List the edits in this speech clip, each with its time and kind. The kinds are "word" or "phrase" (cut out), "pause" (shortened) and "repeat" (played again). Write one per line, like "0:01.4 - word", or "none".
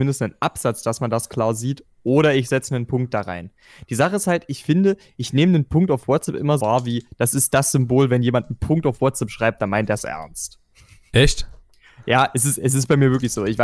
0:06.6 - word

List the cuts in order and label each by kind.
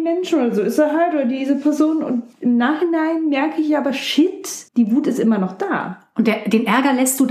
0:02.3 - pause
0:04.7 - pause

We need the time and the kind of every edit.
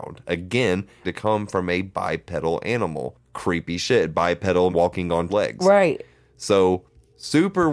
0:01.0 - word
0:04.7 - word
0:05.3 - word

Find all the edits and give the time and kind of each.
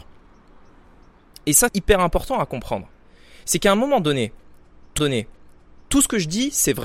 0:01.7 - word
0:05.0 - repeat

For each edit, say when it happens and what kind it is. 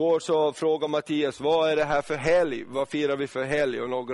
none

